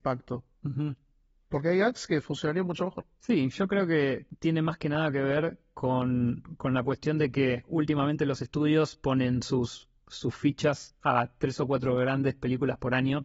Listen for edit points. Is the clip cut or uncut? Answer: uncut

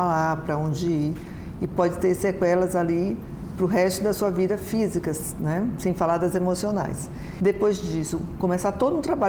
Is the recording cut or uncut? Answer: uncut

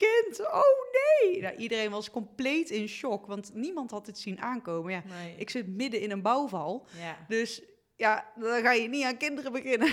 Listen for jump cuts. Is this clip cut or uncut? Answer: uncut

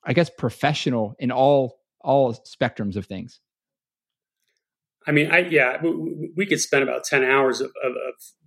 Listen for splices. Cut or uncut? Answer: uncut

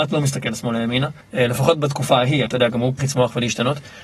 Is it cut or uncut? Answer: cut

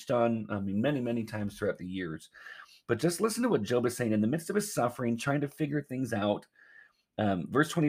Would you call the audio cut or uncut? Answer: uncut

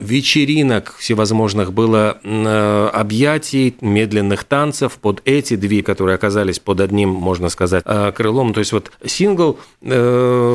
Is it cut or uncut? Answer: cut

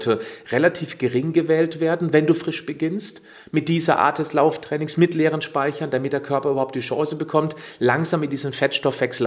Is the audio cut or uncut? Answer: uncut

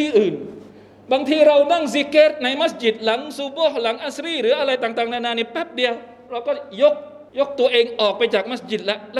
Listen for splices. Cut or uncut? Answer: cut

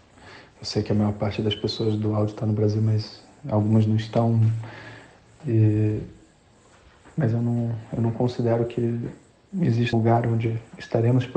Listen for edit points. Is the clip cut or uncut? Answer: cut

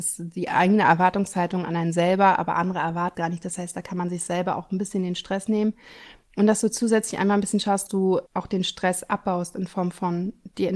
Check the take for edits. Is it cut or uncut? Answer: cut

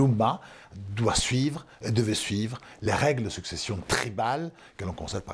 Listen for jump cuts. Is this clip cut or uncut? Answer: uncut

